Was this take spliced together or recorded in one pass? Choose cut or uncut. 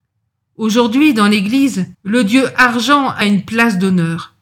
cut